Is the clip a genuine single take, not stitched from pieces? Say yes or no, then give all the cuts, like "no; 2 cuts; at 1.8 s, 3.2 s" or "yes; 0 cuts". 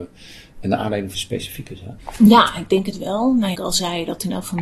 no; 2 cuts; at 1.1 s, 3.5 s